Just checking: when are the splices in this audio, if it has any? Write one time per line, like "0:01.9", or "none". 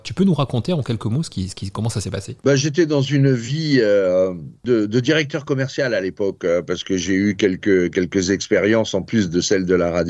0:02.4